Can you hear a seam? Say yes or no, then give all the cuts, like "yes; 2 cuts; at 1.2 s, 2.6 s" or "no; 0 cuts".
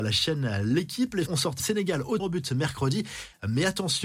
yes; 3 cuts; at 1.3 s, 1.6 s, 2.2 s